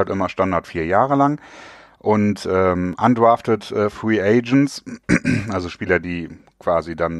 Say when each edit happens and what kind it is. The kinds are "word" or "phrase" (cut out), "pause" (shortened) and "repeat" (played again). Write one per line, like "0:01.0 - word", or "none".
none

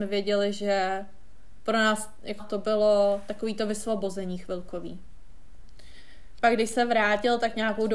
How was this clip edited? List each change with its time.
0:02.4 - word

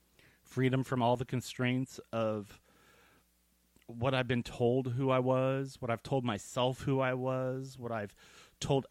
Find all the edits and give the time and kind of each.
none

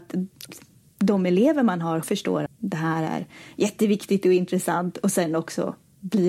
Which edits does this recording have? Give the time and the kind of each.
0:02.0 - word
0:02.5 - word

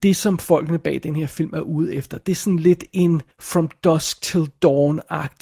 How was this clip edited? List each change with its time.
0:03.3 - pause

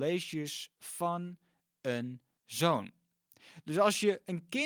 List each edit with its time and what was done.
0:02.4 - word

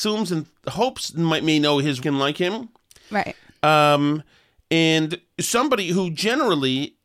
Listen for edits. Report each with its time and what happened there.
0:02.0 - word

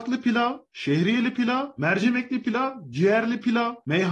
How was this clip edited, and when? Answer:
none

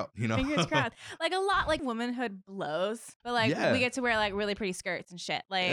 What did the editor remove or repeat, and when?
0:01.8 - phrase
0:03.2 - pause

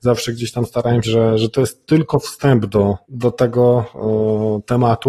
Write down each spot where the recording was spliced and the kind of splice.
0:01.0 - phrase
0:03.0 - pause

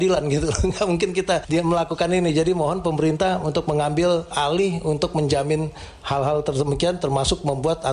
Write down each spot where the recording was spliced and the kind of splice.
none

